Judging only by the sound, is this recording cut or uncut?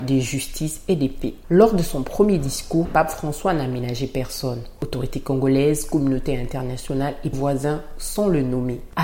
cut